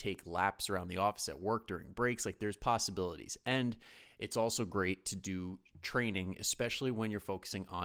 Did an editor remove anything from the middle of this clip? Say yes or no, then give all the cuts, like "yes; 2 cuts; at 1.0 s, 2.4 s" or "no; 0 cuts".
no; 0 cuts